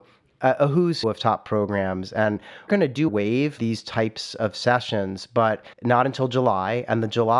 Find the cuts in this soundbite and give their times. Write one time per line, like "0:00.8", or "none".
0:01.0
0:02.7
0:03.1
0:03.6
0:05.7